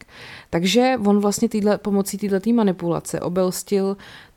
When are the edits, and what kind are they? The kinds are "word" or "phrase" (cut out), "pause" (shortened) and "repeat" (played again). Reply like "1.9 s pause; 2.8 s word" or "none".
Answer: none